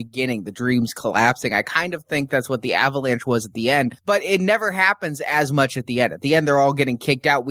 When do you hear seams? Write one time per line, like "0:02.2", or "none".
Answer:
none